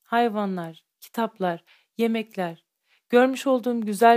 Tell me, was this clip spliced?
no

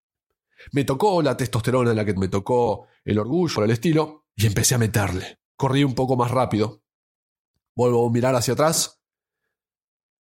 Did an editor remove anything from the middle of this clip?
yes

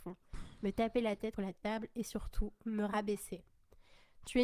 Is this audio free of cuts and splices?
no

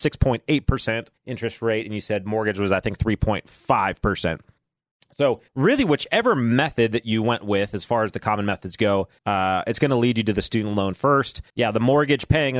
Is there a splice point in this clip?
yes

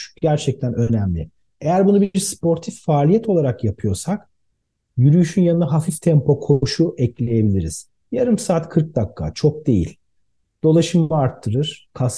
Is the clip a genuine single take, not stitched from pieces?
yes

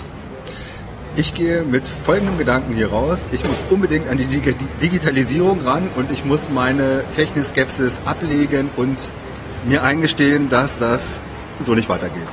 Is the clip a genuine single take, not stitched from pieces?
yes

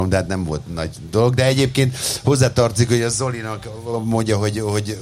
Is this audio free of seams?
yes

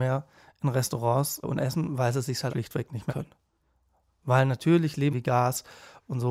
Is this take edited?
yes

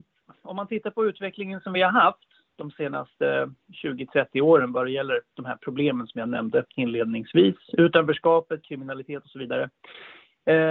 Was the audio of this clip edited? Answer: no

